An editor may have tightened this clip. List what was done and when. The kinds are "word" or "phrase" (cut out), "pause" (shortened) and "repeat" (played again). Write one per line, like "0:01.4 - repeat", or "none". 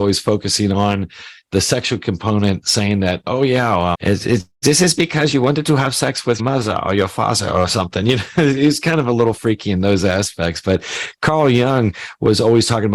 0:03.9 - word
0:06.4 - word